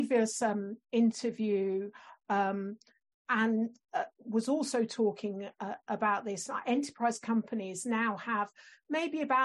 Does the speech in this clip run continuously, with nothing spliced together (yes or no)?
yes